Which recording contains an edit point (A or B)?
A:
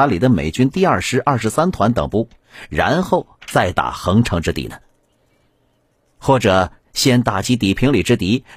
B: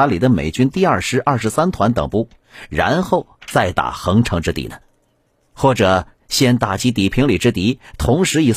B